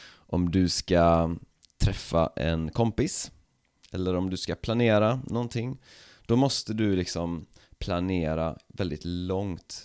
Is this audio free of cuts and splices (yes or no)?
yes